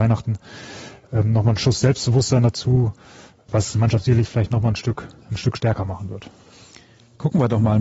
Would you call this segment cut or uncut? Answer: uncut